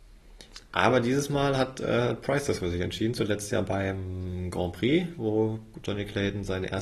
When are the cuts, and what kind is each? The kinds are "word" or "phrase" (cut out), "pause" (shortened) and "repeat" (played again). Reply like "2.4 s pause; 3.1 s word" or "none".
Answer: none

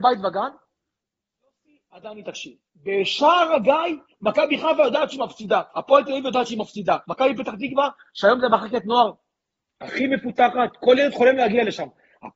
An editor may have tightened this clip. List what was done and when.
5.7 s pause; 7.0 s pause

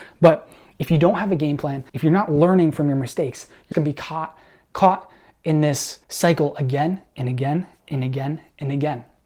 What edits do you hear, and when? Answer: 1.9 s pause; 3.7 s word; 6.0 s pause

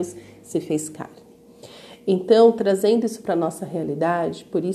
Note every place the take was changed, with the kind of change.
none

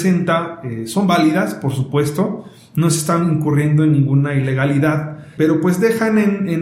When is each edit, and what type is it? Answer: 5.4 s word

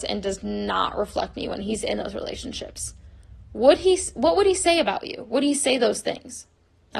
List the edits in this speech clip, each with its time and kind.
none

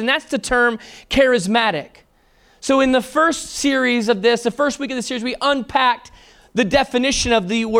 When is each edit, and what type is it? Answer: none

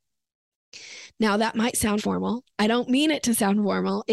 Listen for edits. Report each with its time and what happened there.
2.0 s word

